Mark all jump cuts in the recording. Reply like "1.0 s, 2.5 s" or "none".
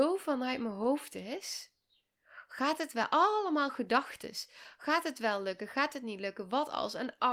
none